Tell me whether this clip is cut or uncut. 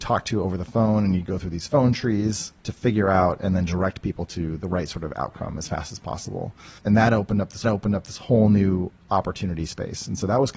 cut